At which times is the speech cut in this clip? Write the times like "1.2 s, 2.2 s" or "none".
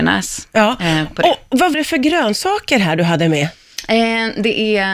1.7 s